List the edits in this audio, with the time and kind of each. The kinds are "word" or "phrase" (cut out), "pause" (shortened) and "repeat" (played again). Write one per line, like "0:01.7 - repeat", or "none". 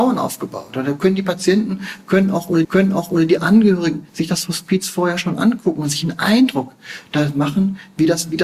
0:02.6 - repeat
0:04.1 - pause